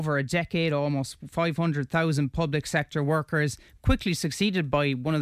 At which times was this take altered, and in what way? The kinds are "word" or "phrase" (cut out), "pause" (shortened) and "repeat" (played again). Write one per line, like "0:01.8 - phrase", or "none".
none